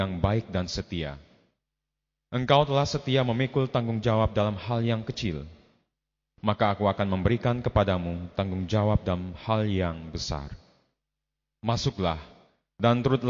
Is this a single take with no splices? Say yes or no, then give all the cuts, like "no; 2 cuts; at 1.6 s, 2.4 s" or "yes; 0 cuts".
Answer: yes; 0 cuts